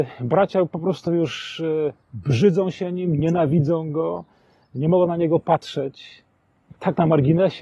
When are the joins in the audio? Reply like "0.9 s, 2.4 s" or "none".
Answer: none